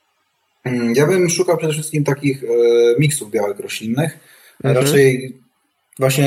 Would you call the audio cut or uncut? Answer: uncut